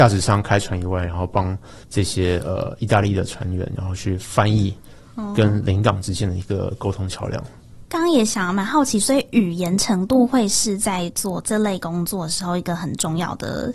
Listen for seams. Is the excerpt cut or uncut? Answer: cut